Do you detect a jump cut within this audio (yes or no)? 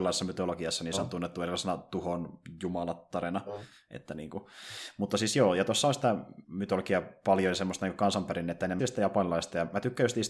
yes